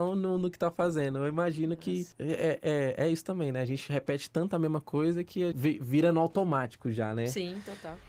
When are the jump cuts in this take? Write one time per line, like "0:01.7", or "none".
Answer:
0:02.1
0:05.5